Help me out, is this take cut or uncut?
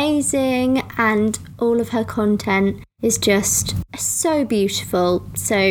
uncut